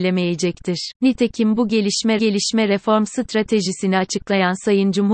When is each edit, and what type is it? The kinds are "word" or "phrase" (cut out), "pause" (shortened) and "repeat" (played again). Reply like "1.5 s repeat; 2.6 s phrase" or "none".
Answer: 1.0 s pause; 2.2 s repeat